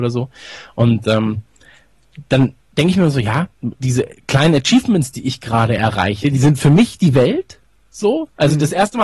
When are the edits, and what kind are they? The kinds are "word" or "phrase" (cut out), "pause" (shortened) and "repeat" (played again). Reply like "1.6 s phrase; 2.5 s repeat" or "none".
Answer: none